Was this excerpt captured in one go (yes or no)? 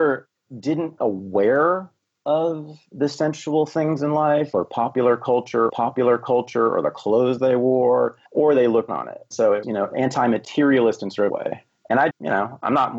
no